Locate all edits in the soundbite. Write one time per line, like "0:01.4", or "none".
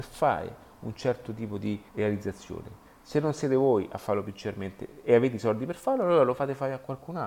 0:01.9